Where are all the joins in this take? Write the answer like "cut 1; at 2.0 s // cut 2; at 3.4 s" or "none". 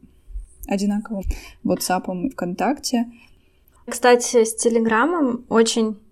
cut 1; at 1.2 s // cut 2; at 2.3 s // cut 3; at 3.9 s